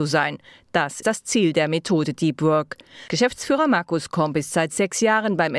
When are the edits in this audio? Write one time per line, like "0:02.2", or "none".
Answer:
0:01.0